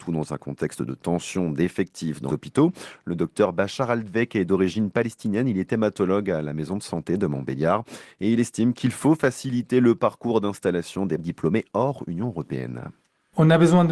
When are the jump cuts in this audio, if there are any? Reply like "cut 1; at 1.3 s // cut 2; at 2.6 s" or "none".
cut 1; at 2.3 s // cut 2; at 11.2 s